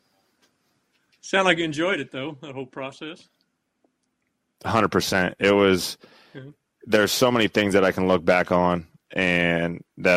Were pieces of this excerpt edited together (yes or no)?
no